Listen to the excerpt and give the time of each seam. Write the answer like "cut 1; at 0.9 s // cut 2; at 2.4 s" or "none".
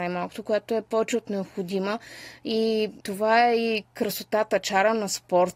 cut 1; at 3.0 s

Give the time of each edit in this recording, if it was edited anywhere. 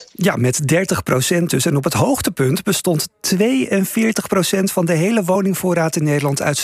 none

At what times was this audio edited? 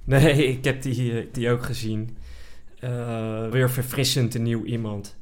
cut 1; at 1.3 s // cut 2; at 3.5 s

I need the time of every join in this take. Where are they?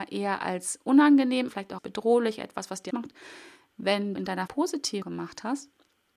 cut 1; at 1.5 s // cut 2; at 1.8 s // cut 3; at 2.9 s // cut 4; at 4.1 s // cut 5; at 4.5 s // cut 6; at 5.0 s

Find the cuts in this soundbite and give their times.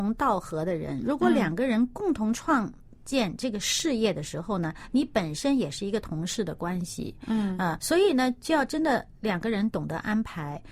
cut 1; at 7.8 s

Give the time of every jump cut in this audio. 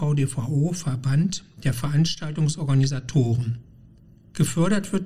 none

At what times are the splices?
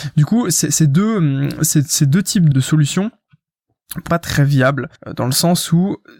cut 1; at 2.5 s // cut 2; at 4.1 s // cut 3; at 5.0 s

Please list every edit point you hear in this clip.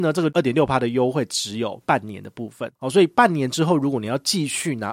cut 1; at 2.8 s

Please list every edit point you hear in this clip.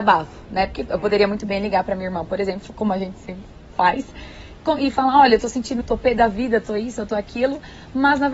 cut 1; at 5.8 s

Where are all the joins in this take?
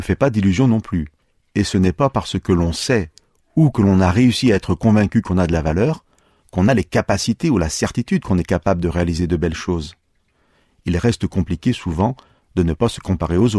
none

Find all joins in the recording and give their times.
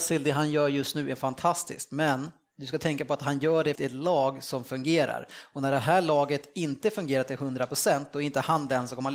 cut 1; at 3.8 s

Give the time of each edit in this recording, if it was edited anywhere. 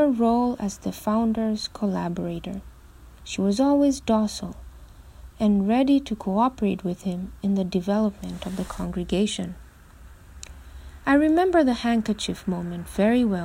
cut 1; at 3.1 s

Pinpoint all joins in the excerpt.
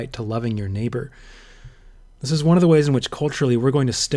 none

